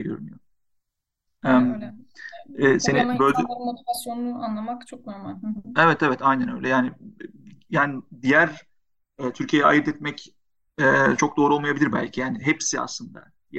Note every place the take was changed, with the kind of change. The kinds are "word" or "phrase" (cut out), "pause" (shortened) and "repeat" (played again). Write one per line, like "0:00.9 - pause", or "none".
none